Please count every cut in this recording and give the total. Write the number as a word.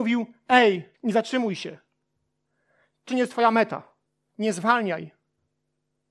three